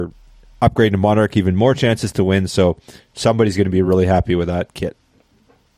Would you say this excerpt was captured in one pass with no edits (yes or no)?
yes